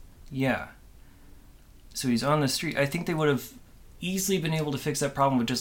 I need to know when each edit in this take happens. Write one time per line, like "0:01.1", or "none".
0:03.7